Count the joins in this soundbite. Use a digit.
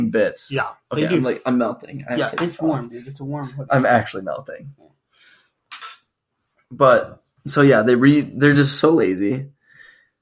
0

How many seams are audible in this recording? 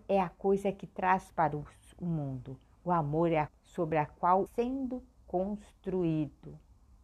3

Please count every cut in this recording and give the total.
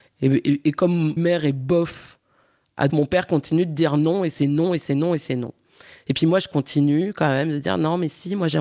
2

